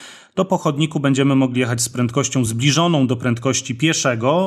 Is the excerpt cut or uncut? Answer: uncut